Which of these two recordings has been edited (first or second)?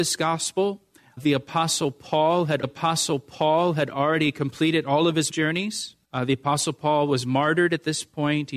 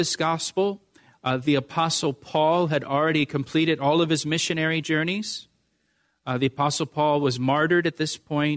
first